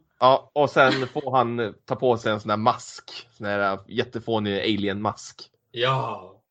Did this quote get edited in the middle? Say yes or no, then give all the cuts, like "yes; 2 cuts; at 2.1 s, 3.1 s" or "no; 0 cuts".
no; 0 cuts